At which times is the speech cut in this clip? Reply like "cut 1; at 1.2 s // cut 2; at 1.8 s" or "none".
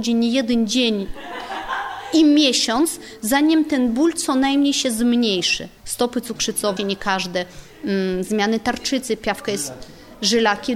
cut 1; at 5.8 s // cut 2; at 6.8 s